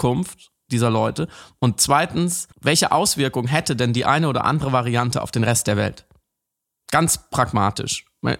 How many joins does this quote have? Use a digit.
1